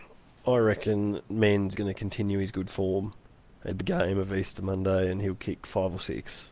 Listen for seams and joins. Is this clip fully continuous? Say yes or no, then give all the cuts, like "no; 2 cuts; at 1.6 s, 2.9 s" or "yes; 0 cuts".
no; 3 cuts; at 1.3 s, 1.7 s, 3.7 s